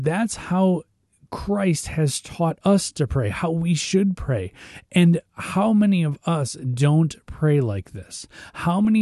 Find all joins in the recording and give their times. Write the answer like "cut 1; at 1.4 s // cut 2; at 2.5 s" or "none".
none